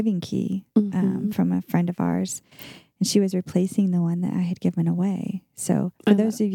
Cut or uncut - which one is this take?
uncut